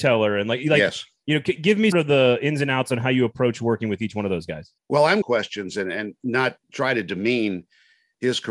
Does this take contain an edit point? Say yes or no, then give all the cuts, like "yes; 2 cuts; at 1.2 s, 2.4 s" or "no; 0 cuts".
yes; 5 cuts; at 1.6 s, 1.9 s, 4.8 s, 5.2 s, 6.6 s